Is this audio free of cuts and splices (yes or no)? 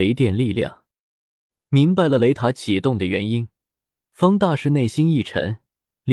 yes